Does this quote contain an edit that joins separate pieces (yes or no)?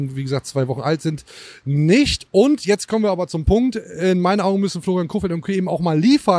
no